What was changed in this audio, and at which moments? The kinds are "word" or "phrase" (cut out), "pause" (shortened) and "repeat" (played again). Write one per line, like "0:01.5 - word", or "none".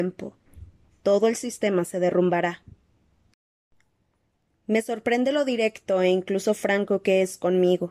none